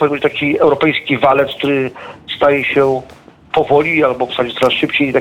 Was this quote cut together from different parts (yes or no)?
no